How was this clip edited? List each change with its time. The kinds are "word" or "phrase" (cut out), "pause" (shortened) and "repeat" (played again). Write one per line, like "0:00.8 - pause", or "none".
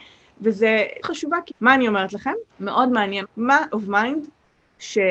0:01.0 - phrase
0:01.5 - word
0:02.5 - pause
0:03.2 - word
0:03.7 - word